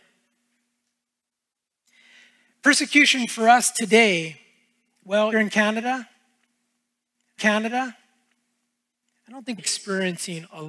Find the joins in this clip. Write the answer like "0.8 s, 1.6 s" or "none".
5.3 s, 7.4 s, 9.6 s